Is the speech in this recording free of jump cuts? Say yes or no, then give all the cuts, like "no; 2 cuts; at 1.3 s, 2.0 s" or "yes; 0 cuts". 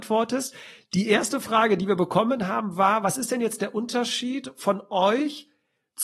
yes; 0 cuts